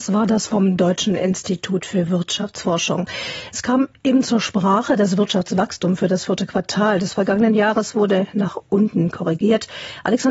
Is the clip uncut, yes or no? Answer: yes